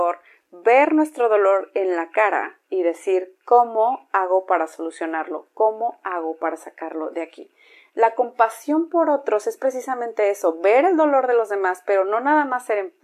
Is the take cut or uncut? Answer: cut